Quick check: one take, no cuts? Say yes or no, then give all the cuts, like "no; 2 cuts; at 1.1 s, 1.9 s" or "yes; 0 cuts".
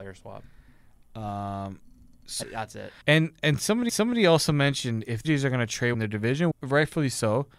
no; 6 cuts; at 2.4 s, 3.0 s, 3.9 s, 5.2 s, 5.9 s, 6.5 s